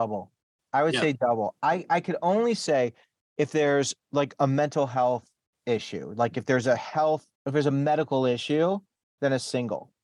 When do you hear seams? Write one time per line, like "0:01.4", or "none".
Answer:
0:07.4